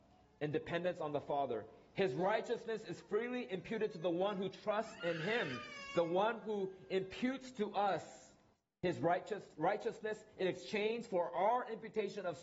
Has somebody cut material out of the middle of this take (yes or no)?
yes